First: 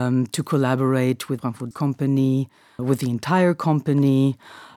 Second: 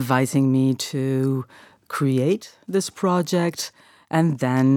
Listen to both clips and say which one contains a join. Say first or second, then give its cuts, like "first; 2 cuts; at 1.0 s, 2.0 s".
first; 3 cuts; at 1.4 s, 1.7 s, 2.8 s